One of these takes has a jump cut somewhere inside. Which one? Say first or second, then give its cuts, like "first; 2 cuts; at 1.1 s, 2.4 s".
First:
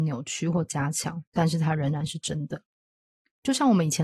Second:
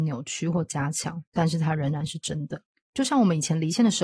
second; 1 cut; at 2.8 s